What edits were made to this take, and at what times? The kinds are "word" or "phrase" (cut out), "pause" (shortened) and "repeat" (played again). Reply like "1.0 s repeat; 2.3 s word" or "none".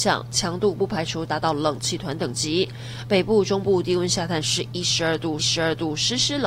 5.4 s repeat